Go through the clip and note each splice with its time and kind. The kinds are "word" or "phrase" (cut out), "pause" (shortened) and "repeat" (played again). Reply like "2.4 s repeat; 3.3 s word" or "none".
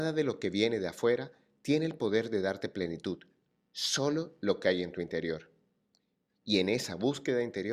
none